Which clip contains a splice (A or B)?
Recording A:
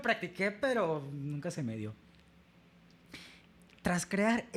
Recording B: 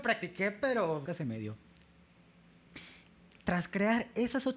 B